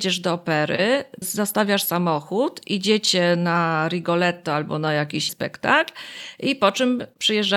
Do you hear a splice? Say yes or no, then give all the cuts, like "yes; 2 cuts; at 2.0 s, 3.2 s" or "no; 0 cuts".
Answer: yes; 2 cuts; at 1.2 s, 5.3 s